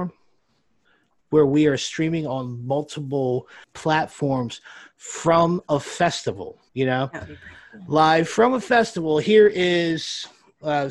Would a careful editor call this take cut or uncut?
cut